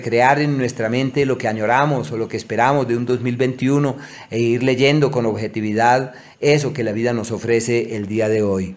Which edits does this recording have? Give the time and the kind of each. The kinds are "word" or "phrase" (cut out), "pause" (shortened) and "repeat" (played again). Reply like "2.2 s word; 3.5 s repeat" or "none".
none